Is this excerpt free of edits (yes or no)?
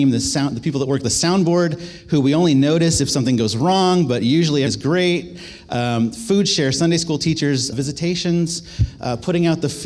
no